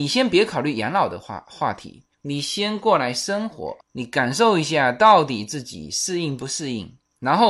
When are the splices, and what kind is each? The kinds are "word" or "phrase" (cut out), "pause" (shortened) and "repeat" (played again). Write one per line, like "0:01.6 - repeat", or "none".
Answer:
0:02.1 - pause